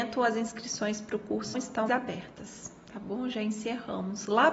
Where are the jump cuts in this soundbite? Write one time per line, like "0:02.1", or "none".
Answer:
0:01.5
0:01.9